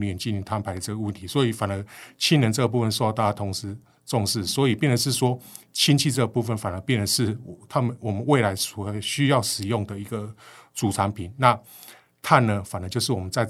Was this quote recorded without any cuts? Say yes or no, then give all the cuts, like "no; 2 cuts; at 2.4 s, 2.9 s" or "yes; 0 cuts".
yes; 0 cuts